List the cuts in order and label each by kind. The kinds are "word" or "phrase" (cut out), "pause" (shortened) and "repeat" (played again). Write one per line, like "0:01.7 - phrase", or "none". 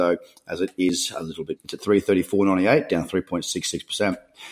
0:01.6 - word